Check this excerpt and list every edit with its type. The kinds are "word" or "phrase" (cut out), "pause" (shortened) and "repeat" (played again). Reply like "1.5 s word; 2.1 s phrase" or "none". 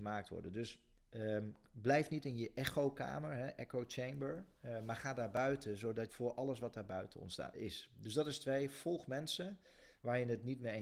1.0 s pause; 6.1 s phrase; 7.5 s word